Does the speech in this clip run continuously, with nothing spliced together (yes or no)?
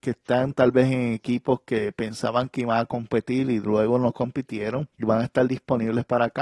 no